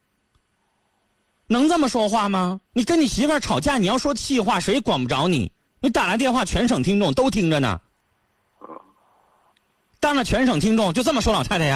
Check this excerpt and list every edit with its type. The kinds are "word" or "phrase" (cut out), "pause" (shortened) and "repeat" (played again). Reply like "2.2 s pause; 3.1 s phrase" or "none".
2.6 s pause; 5.6 s pause